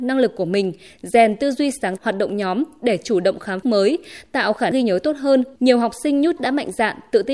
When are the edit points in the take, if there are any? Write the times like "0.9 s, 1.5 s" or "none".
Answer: 2.0 s, 3.6 s, 4.7 s, 5.6 s, 6.4 s